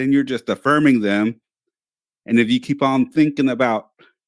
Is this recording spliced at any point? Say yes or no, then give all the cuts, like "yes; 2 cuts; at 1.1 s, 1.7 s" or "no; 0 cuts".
no; 0 cuts